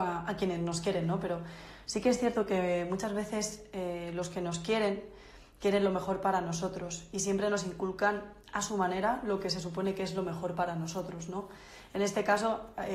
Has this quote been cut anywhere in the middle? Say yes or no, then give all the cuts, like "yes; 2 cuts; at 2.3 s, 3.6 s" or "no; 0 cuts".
no; 0 cuts